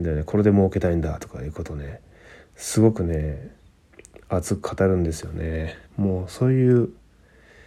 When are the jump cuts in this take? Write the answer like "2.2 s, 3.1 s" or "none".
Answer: 5.9 s

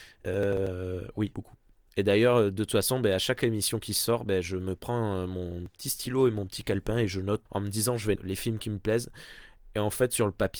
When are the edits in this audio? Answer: 1.3 s, 7.5 s, 8.2 s

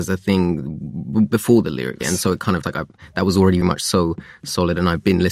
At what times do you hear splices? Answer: 2.0 s, 2.6 s, 3.6 s

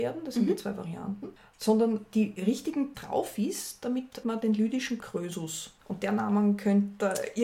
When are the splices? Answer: 2.9 s, 4.2 s, 5.0 s, 5.8 s

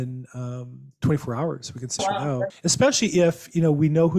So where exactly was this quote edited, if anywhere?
2.0 s, 2.5 s

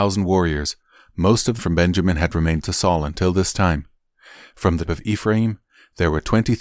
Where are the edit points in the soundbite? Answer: 1.6 s, 2.6 s, 4.9 s

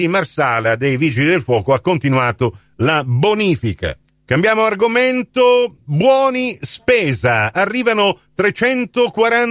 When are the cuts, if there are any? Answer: none

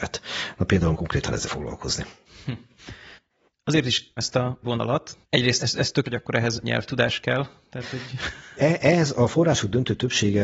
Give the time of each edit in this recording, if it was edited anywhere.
0.9 s, 1.4 s, 4.2 s, 4.6 s, 5.6 s, 6.0 s, 6.6 s, 8.6 s

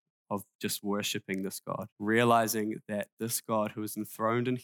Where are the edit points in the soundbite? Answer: 1.9 s

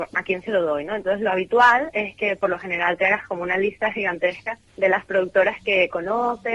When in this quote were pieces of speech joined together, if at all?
4.7 s

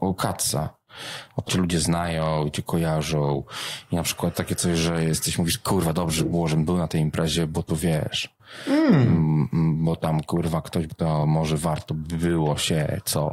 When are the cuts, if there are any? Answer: 1.5 s, 4.3 s, 10.9 s

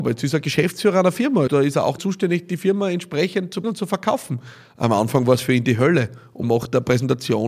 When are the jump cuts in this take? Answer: 1.5 s, 2.0 s, 3.6 s, 6.4 s

